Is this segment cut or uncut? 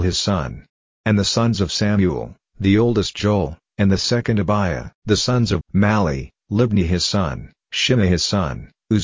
cut